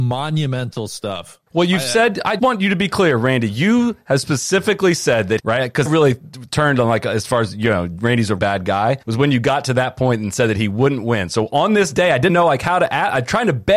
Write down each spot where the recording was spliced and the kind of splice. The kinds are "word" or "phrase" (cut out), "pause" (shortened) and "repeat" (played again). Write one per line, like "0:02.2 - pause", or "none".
0:01.5 - pause
0:02.4 - word
0:05.4 - phrase
0:05.9 - phrase
0:08.4 - word
0:09.0 - pause
0:12.3 - word